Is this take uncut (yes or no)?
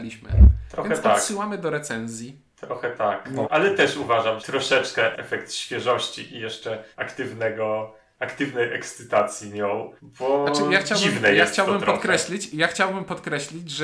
no